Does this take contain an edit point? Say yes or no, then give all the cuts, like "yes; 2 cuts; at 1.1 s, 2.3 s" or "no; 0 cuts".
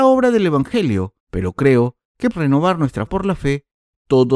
yes; 3 cuts; at 1.2 s, 2.3 s, 3.1 s